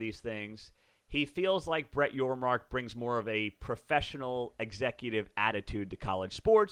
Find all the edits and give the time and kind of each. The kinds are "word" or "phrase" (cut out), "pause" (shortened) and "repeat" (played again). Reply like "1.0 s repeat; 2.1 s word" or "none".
none